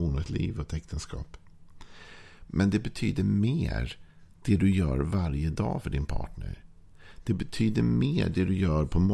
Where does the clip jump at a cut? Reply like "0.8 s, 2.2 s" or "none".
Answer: none